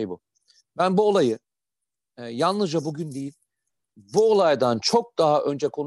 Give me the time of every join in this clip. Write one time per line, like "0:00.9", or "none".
none